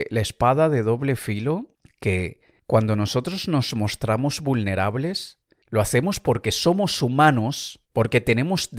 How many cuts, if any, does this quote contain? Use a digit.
0